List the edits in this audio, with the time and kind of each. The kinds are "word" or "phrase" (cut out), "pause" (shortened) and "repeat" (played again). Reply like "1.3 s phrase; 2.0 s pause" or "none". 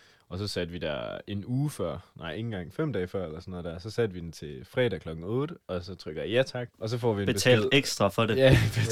6.7 s pause